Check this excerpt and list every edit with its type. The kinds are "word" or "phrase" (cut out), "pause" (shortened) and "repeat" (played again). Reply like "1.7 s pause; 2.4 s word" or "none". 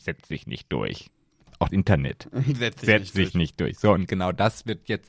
1.7 s word